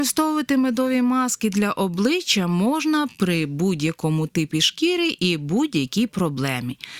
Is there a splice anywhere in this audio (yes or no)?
no